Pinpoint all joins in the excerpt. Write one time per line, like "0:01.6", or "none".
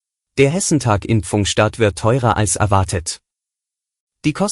none